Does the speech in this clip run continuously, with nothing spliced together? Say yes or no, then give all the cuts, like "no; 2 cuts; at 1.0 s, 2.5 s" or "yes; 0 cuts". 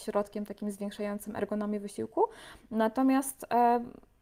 yes; 0 cuts